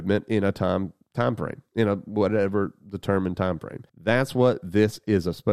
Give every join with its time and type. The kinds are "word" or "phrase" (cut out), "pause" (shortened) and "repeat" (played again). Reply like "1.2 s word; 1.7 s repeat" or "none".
3.9 s pause